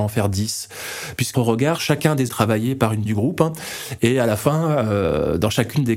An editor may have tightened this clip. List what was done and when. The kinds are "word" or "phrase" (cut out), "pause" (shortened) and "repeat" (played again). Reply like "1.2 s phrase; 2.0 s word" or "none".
1.3 s phrase; 1.8 s word; 2.3 s phrase; 3.1 s word

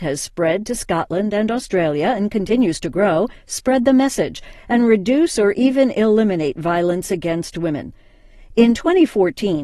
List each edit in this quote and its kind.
none

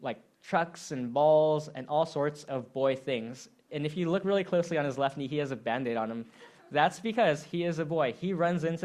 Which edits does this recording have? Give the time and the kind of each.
none

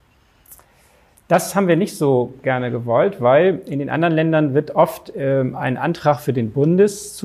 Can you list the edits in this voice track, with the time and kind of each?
none

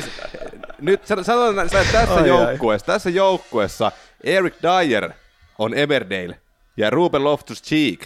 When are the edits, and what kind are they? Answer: 1.7 s phrase

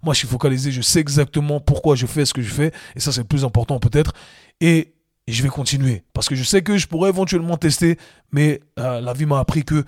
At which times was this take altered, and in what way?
none

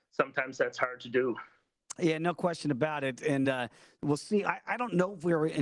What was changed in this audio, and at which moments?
none

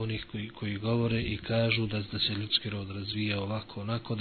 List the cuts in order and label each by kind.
none

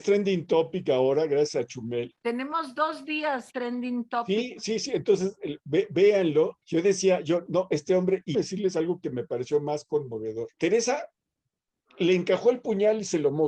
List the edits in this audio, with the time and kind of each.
2.2 s pause; 3.5 s word; 6.6 s pause; 7.5 s word; 8.3 s phrase; 10.5 s pause

